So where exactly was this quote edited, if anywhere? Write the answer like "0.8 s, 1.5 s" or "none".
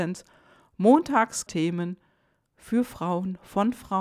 1.5 s